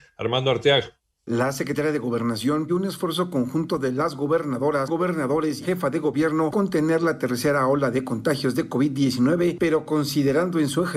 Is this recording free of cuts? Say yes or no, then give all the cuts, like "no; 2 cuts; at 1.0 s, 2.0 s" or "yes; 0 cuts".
no; 4 cuts; at 2.7 s, 4.9 s, 5.6 s, 6.5 s